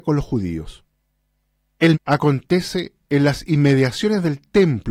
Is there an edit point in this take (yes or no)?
yes